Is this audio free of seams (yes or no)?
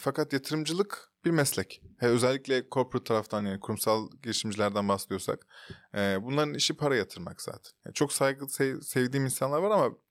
yes